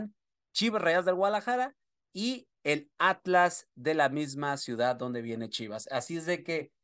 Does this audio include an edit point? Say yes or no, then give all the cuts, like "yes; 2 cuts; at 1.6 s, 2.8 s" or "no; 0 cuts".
no; 0 cuts